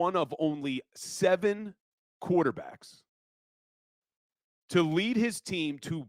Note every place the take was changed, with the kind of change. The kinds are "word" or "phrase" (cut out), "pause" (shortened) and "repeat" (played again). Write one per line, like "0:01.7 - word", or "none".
none